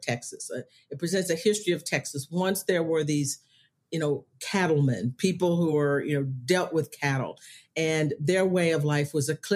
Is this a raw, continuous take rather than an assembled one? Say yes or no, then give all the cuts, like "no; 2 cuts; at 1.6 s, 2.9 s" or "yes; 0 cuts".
yes; 0 cuts